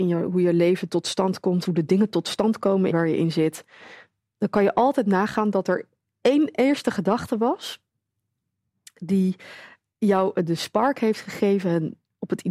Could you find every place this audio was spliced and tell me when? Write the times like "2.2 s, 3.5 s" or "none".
1.7 s, 2.9 s